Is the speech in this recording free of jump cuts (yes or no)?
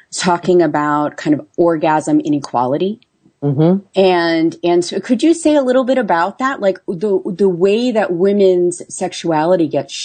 yes